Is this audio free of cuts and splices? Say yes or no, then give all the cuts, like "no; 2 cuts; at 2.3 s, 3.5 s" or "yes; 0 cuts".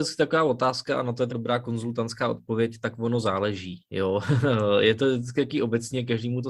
no; 1 cut; at 1.3 s